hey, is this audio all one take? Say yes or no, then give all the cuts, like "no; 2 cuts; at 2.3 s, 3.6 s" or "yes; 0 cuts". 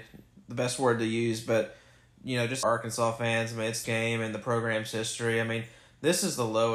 no; 2 cuts; at 2.6 s, 3.8 s